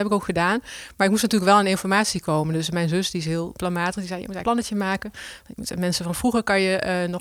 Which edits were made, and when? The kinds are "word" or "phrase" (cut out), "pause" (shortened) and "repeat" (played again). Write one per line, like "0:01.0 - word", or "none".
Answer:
0:04.4 - word